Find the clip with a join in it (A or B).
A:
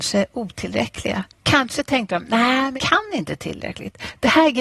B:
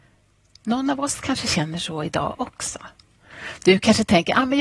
A